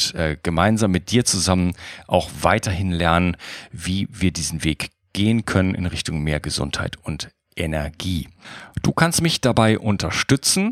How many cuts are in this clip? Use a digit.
0